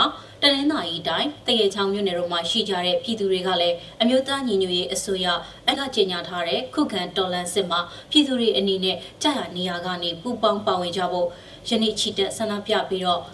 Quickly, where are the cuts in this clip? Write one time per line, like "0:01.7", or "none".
0:05.7